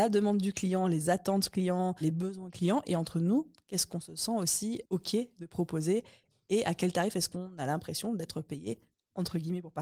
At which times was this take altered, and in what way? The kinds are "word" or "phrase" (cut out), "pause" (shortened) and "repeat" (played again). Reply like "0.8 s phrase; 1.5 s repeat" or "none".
none